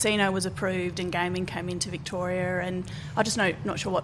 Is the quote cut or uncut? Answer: uncut